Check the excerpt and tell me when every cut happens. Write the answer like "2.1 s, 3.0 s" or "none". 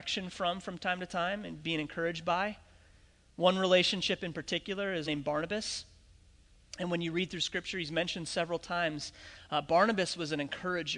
5.1 s